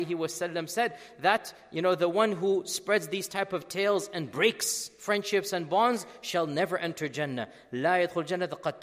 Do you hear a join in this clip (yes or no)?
no